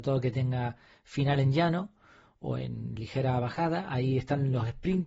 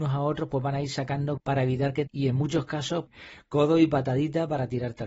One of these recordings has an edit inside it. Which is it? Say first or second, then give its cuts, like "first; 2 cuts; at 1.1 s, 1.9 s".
second; 3 cuts; at 1.4 s, 2.1 s, 3.1 s